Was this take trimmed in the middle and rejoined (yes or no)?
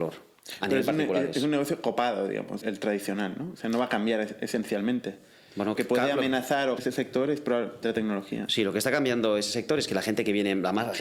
yes